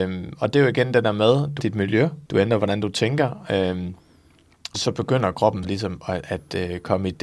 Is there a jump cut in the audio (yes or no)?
yes